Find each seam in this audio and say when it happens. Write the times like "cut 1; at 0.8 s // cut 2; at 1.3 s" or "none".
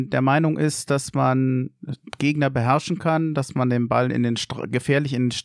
none